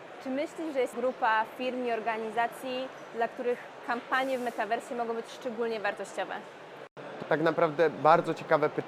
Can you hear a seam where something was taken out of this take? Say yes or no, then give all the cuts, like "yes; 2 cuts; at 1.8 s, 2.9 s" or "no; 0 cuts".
yes; 2 cuts; at 0.9 s, 7.2 s